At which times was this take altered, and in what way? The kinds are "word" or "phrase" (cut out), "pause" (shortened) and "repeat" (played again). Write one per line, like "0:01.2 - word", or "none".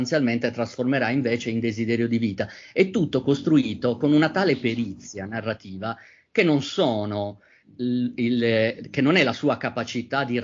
none